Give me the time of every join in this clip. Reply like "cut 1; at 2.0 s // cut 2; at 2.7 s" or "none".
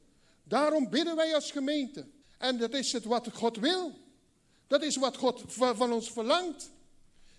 cut 1; at 2.2 s